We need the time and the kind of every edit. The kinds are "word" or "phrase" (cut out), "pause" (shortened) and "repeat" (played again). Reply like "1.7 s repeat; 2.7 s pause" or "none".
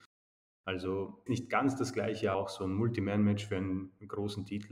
1.3 s word; 2.3 s word

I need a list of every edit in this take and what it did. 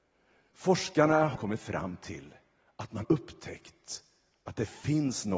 1.4 s word; 3.0 s word

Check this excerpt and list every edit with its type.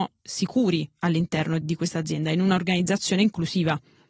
1.6 s word

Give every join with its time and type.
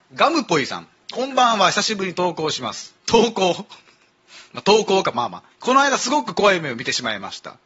3.0 s pause; 5.5 s pause

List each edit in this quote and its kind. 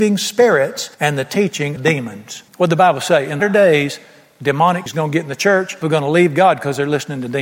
0.9 s pause; 1.8 s word; 2.5 s pause; 3.4 s word; 4.9 s word; 5.8 s phrase

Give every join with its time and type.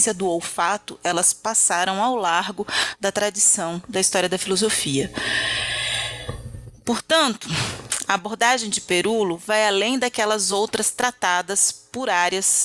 none

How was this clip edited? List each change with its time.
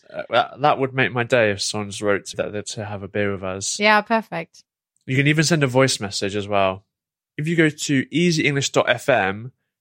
2.3 s word; 2.6 s word

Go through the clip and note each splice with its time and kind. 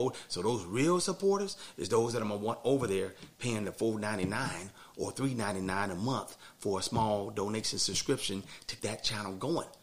8.8 s word

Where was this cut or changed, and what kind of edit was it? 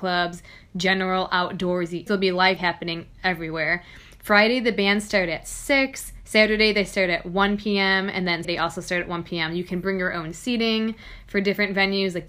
2.1 s word; 2.6 s word; 8.4 s word

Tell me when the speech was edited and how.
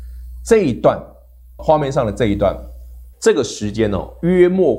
1.6 s word; 3.1 s pause

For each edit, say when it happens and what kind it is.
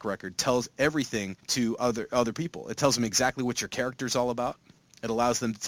1.4 s pause

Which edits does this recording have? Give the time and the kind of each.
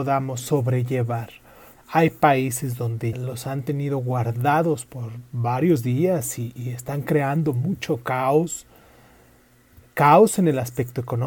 3.1 s word; 4.9 s word; 6.6 s word

